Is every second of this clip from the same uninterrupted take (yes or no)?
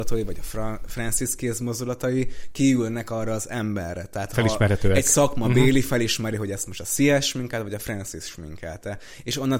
yes